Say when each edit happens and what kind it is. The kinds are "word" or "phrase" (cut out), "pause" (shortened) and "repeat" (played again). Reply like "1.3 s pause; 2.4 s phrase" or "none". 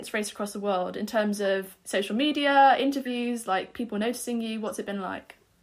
none